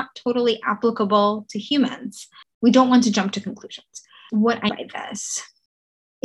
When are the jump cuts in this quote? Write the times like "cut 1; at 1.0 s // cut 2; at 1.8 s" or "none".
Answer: cut 1; at 4.7 s